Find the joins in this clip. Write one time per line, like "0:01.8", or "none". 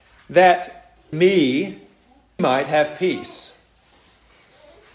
0:01.1
0:02.4